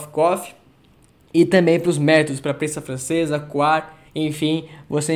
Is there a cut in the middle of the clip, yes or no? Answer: yes